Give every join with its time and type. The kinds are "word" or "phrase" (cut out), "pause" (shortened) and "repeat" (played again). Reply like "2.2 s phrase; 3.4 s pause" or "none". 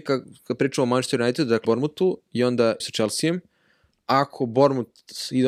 1.6 s word; 2.8 s word; 3.9 s word